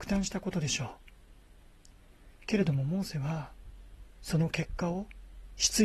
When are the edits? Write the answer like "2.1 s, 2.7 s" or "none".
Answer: 2.4 s